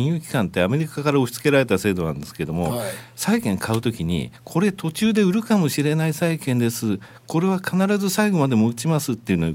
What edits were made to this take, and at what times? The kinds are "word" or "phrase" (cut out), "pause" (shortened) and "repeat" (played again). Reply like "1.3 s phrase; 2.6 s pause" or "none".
4.4 s pause